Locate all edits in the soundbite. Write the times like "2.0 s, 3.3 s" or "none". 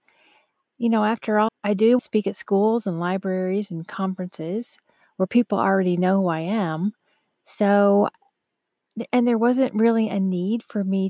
1.5 s, 2.0 s